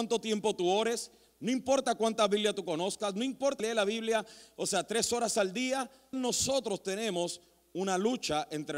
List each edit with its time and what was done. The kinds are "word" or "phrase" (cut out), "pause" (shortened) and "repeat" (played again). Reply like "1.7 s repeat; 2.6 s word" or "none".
3.6 s word; 6.1 s word